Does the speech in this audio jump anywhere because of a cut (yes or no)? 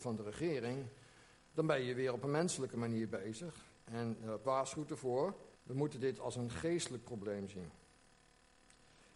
yes